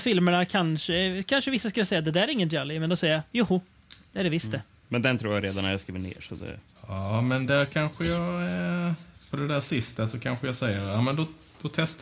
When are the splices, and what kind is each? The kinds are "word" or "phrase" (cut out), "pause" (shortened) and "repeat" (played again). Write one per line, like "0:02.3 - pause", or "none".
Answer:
0:04.8 - pause